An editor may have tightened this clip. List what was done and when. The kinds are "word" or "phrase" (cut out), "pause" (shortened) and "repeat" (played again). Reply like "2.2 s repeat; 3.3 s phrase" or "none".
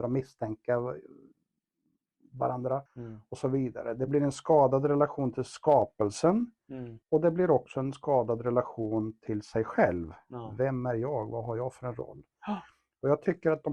2.9 s pause; 7.0 s pause

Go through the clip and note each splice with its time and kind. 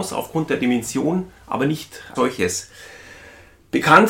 1.4 s pause; 2.1 s phrase

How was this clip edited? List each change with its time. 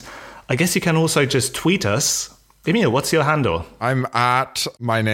none

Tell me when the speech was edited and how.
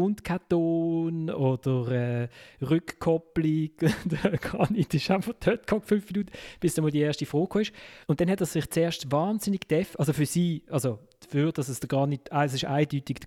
8.0 s pause

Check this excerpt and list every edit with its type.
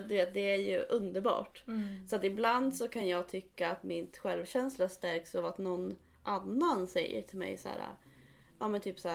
none

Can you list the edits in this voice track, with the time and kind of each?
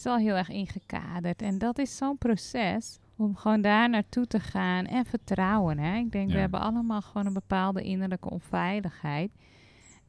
3.0 s pause; 4.9 s word

